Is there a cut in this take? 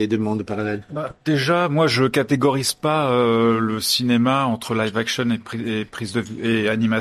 yes; 1 cut; at 1.2 s

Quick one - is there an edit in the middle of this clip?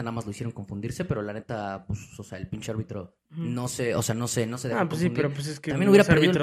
yes; 1 cut; at 3.3 s

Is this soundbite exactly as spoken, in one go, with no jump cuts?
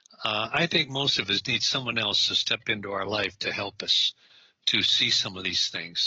yes; 0 cuts

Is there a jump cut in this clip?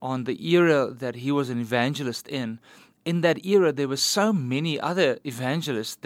no; 0 cuts

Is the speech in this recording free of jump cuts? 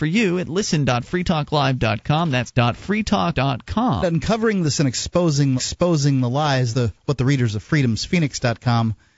no; 6 cuts; at 2.5 s, 3.3 s, 4.0 s, 4.7 s, 5.6 s, 6.7 s

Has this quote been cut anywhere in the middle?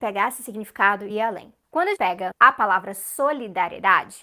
yes; 3 cuts; at 1.1 s, 2.0 s, 2.3 s

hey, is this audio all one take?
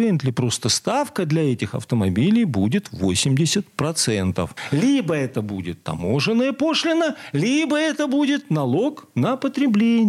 yes; 0 cuts

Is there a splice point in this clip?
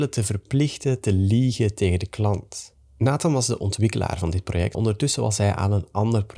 yes; 1 cut; at 4.7 s

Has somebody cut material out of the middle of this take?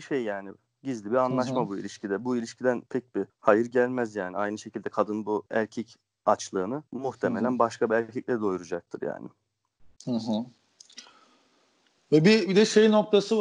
yes; 4 cuts; at 2.9 s, 3.3 s, 5.5 s, 6.9 s

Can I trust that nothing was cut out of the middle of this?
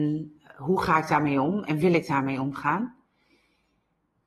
yes; 0 cuts

